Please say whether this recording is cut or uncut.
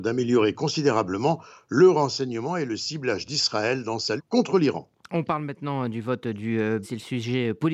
cut